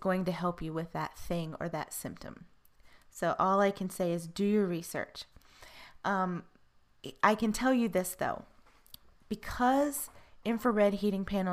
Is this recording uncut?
yes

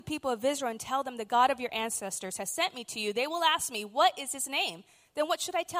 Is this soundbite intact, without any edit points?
yes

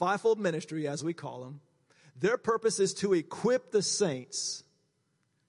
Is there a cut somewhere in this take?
no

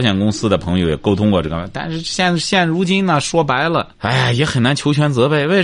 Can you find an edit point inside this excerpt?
yes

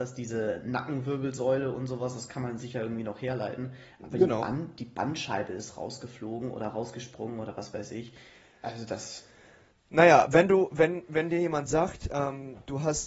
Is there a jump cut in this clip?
no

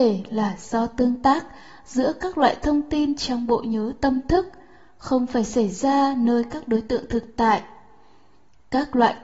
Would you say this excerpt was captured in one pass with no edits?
yes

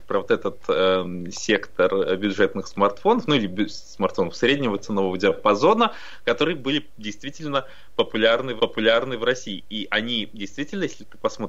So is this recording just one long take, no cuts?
no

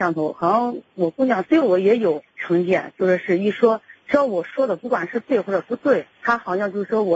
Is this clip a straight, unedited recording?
no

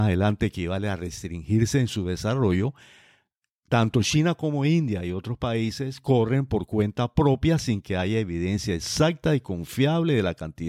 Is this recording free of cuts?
yes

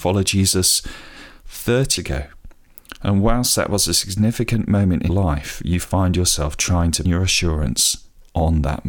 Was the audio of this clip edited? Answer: yes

